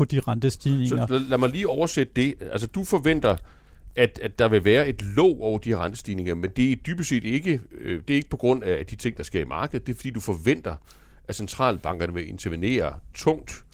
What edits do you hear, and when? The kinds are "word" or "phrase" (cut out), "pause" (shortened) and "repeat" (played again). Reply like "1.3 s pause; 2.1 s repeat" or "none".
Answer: none